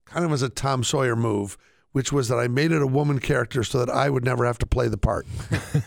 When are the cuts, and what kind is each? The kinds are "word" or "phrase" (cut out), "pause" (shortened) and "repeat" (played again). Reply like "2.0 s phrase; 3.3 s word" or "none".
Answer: none